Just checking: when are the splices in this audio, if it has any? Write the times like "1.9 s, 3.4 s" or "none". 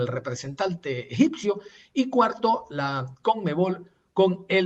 none